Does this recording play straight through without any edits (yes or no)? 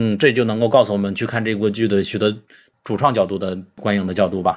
yes